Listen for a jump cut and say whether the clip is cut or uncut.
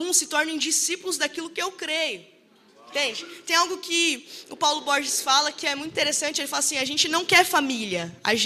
uncut